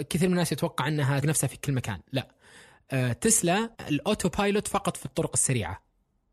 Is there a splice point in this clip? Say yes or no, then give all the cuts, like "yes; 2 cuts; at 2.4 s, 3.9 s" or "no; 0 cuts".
yes; 2 cuts; at 1.2 s, 3.7 s